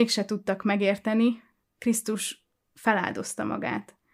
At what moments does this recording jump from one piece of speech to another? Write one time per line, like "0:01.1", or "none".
0:01.6